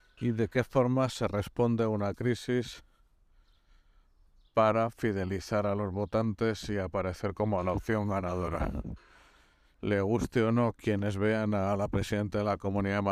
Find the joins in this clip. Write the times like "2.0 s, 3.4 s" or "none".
none